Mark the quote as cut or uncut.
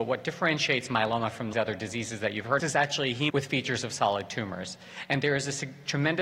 cut